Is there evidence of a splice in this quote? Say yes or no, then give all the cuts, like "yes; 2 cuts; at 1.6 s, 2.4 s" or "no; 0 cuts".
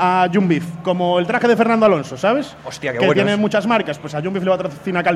no; 0 cuts